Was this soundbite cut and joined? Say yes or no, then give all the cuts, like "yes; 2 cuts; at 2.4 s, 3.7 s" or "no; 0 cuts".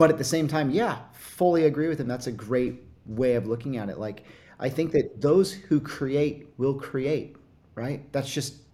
no; 0 cuts